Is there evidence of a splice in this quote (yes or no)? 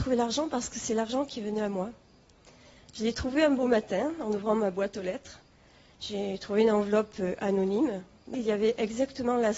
yes